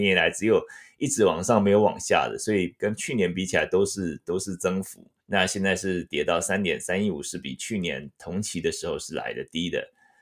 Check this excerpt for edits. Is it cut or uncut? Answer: cut